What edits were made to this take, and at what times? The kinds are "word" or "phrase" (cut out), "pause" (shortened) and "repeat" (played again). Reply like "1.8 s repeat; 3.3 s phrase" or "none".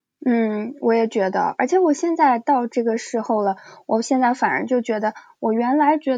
none